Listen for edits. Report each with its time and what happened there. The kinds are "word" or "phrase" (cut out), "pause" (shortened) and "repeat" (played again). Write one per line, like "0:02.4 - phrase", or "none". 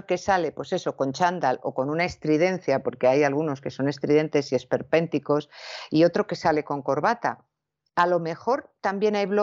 none